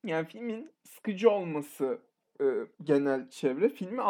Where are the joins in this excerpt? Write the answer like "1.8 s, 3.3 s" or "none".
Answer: 2.2 s

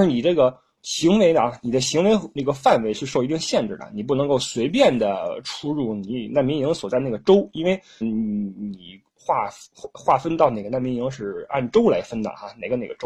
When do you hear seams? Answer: 8.0 s

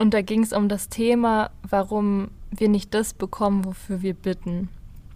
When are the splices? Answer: none

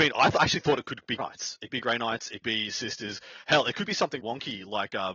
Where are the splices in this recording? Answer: 1.2 s, 1.7 s, 2.4 s, 4.2 s

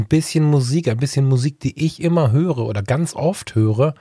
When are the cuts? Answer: none

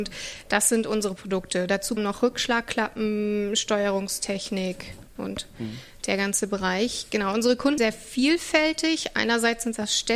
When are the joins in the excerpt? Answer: 2.0 s, 7.8 s

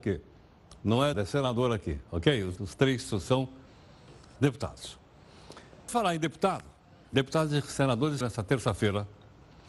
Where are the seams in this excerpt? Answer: 1.1 s, 2.6 s, 4.4 s, 5.9 s, 8.2 s

